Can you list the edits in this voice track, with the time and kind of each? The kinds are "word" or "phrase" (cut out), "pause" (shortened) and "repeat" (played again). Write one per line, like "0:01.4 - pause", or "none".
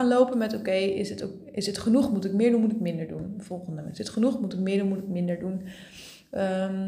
none